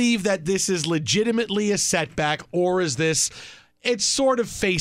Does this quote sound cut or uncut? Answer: uncut